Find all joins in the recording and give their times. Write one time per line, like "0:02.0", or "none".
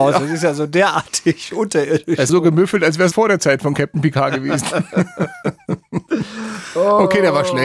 0:02.3
0:03.1